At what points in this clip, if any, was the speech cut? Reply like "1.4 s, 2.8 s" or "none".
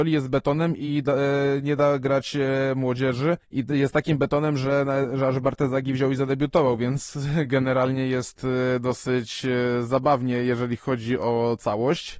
3.4 s